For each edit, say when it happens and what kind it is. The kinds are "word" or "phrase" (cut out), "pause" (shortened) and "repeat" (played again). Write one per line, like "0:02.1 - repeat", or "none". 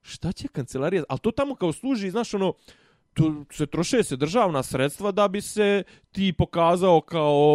none